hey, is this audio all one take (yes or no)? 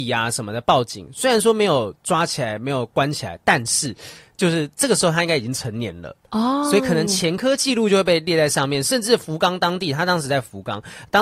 yes